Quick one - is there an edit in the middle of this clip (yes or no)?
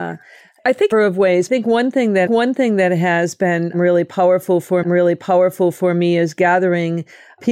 yes